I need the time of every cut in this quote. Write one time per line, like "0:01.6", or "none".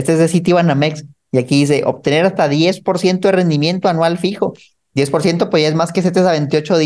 none